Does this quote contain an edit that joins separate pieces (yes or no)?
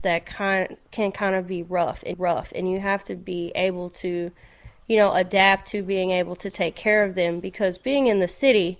yes